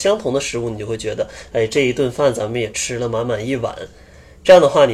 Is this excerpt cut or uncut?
uncut